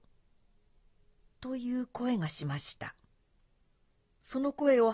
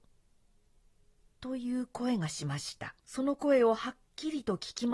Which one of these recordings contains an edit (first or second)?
second